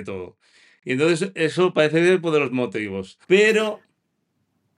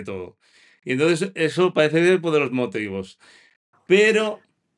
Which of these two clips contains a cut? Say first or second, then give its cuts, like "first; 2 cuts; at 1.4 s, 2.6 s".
first; 1 cut; at 3.2 s